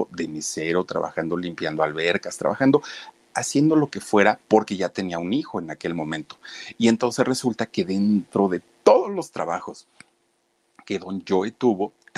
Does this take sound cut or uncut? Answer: cut